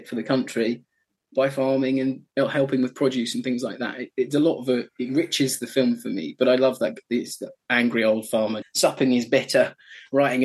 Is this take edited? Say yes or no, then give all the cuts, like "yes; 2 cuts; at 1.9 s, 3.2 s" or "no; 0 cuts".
yes; 2 cuts; at 2.3 s, 8.6 s